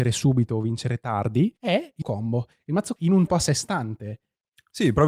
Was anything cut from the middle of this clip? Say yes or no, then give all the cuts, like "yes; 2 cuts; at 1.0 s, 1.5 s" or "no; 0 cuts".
yes; 4 cuts; at 1.6 s, 2.0 s, 3.0 s, 3.3 s